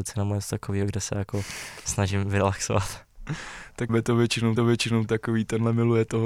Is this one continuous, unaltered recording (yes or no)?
no